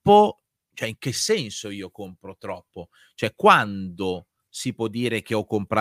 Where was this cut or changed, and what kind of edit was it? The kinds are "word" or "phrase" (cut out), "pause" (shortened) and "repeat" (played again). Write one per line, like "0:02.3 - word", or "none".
none